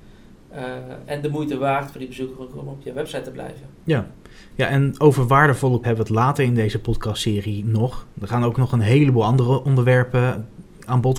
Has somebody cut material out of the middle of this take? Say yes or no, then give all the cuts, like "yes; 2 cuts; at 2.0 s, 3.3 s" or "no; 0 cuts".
yes; 2 cuts; at 3.7 s, 5.8 s